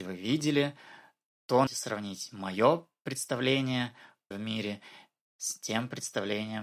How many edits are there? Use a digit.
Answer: 2